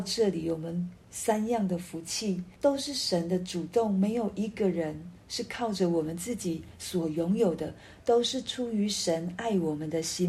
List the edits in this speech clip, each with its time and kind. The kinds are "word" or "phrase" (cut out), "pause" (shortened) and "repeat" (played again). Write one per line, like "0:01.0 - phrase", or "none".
0:01.0 - pause
0:02.6 - pause